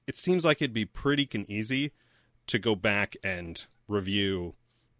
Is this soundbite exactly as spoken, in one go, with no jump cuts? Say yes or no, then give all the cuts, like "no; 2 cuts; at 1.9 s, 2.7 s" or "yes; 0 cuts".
no; 1 cut; at 1.3 s